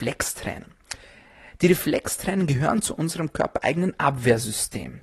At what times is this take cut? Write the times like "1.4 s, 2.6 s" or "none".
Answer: none